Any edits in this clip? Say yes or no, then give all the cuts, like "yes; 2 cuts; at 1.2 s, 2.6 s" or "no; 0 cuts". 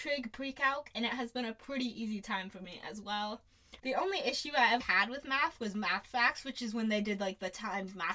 yes; 2 cuts; at 3.8 s, 4.8 s